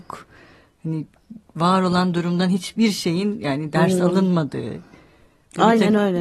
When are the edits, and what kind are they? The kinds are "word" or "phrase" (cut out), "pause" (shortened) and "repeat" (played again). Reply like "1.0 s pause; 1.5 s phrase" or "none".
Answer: none